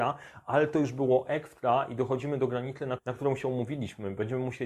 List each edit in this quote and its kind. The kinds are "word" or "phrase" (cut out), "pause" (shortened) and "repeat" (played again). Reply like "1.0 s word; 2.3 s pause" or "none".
3.0 s word